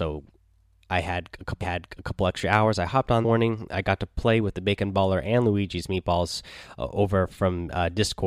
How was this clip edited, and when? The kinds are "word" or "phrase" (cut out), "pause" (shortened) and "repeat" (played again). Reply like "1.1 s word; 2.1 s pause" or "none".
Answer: 1.6 s repeat; 3.2 s word